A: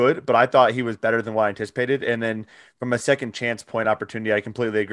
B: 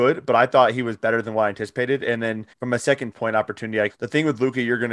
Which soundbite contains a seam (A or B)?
B